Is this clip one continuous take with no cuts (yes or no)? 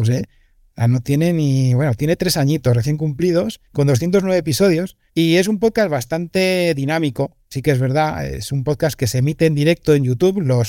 no